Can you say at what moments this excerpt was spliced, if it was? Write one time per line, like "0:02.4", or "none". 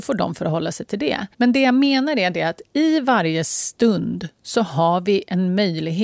0:01.3